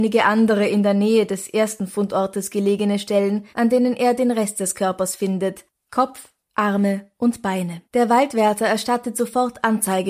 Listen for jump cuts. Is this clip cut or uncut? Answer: cut